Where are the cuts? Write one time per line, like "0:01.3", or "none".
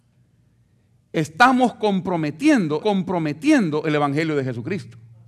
0:02.8